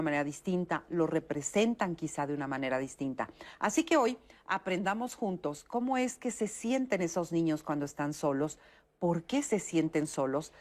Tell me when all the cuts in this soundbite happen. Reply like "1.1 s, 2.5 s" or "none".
none